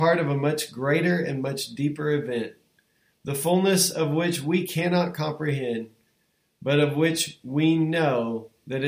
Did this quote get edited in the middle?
no; 0 cuts

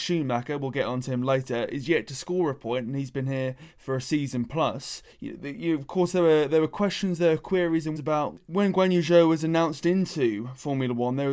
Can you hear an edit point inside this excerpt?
yes; 2 cuts; at 5.1 s, 8.0 s

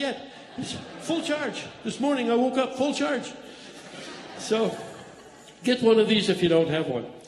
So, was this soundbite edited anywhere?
no; 0 cuts

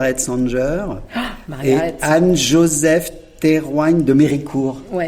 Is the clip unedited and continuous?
yes; 0 cuts

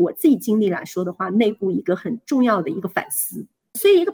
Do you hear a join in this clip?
no; 0 cuts

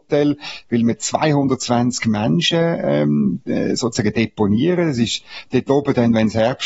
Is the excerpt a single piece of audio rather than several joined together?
yes; 0 cuts

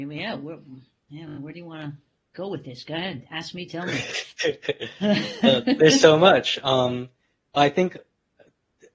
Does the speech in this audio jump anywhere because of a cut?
no; 0 cuts

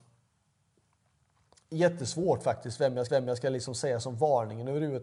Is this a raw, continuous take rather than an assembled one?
no; 1 cut; at 3.1 s

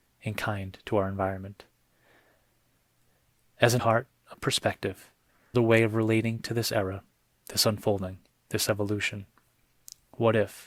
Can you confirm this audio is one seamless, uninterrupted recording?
no; 3 cuts; at 3.8 s, 4.3 s, 5.5 s

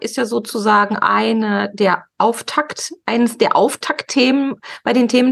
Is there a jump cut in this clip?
no; 0 cuts

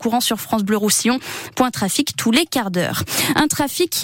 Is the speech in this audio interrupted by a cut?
no; 0 cuts

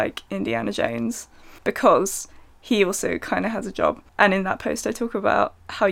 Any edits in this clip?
yes; 2 cuts; at 1.6 s, 4.1 s

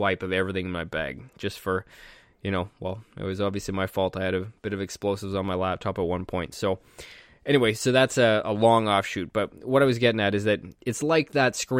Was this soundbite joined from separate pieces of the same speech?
no; 0 cuts

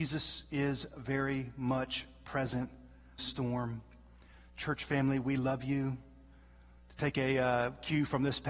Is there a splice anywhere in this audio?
yes; 1 cut; at 3.2 s

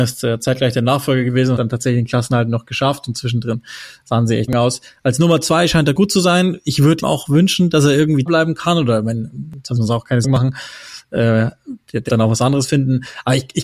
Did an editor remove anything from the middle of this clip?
yes; 7 cuts; at 1.6 s, 4.5 s, 7.0 s, 8.3 s, 9.8 s, 10.2 s, 12.1 s

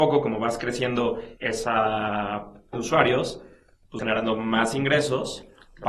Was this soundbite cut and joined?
yes; 3 cuts; at 1.4 s, 2.7 s, 4.0 s

